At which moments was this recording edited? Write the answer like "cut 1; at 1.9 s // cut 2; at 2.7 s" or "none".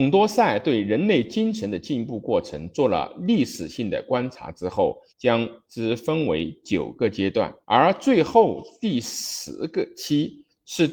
cut 1; at 5.1 s // cut 2; at 7.6 s

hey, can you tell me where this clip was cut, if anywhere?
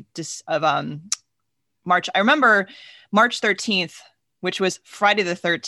none

